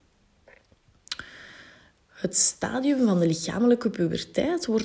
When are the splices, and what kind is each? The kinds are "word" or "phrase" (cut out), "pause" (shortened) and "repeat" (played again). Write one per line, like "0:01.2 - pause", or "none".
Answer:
none